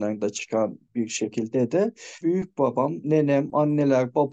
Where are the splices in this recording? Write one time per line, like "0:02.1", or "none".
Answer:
0:02.2